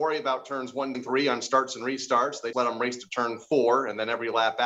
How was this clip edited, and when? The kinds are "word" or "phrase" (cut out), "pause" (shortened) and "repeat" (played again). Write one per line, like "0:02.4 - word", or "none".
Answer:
0:00.9 - word
0:02.5 - word

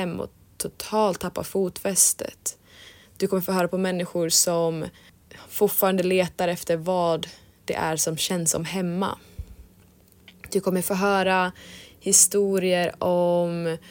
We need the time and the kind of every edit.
none

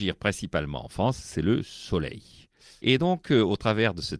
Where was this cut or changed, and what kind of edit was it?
none

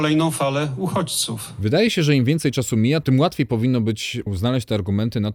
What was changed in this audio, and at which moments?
none

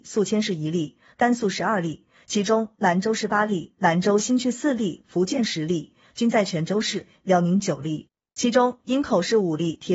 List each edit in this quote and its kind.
none

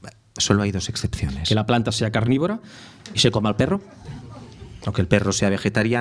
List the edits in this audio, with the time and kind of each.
none

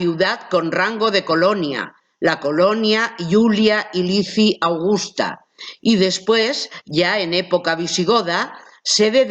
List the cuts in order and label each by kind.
none

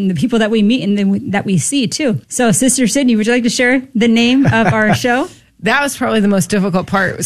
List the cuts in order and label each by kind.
0:02.2 - pause

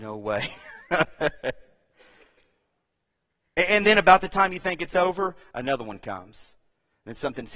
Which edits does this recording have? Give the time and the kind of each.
none

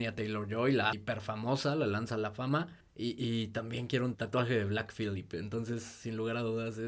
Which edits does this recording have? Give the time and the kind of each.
0:00.9 - word
0:02.8 - pause
0:04.1 - word

